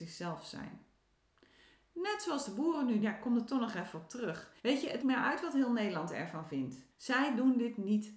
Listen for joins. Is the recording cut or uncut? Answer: cut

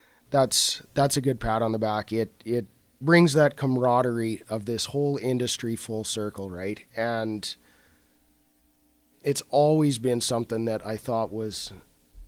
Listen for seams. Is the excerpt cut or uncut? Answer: cut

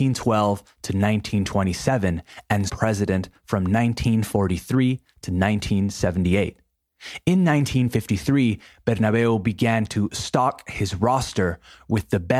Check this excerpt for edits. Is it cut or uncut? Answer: cut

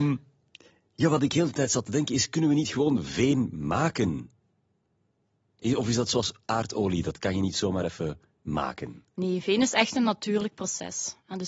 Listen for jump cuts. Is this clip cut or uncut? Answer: uncut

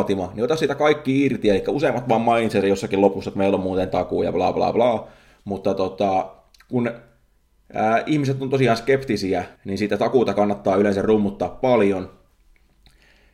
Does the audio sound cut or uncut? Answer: cut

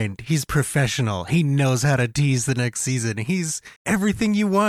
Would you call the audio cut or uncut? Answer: cut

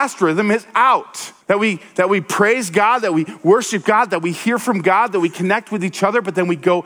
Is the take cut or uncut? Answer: cut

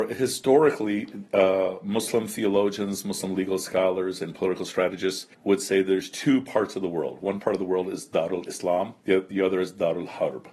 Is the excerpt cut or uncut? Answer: cut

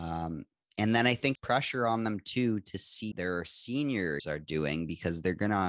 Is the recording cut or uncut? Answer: cut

